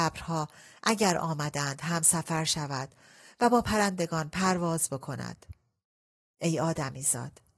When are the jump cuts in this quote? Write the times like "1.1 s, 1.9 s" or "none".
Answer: none